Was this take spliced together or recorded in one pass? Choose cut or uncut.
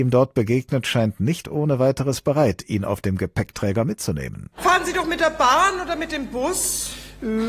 uncut